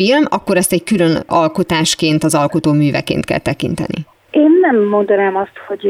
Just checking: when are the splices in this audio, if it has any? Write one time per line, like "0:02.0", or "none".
none